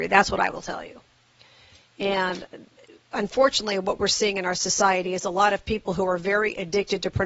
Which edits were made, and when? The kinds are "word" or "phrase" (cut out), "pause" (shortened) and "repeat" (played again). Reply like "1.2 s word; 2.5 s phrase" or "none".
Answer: none